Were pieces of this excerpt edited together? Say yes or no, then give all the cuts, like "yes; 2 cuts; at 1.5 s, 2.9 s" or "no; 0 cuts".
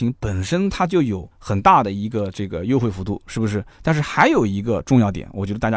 yes; 2 cuts; at 1.3 s, 3.7 s